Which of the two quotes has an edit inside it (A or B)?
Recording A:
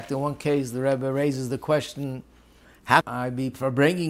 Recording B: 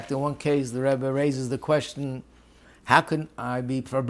A